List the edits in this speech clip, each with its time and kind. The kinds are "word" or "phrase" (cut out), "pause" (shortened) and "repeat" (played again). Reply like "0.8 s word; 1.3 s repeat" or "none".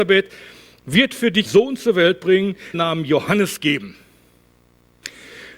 1.5 s word; 2.7 s phrase